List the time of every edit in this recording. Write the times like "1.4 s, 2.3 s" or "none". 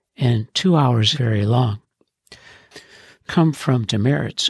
1.1 s, 3.3 s